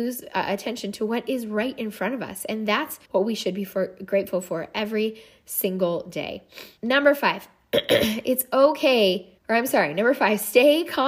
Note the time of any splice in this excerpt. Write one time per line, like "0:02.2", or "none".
0:03.0
0:06.8
0:09.4